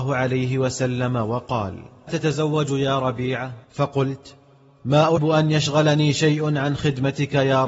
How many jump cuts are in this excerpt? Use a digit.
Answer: 3